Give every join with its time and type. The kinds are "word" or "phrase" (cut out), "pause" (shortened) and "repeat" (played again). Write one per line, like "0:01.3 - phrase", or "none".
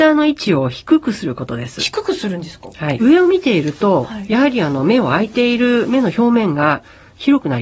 0:03.0 - phrase